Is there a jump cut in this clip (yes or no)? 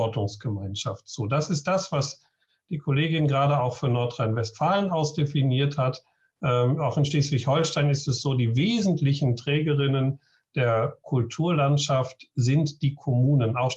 no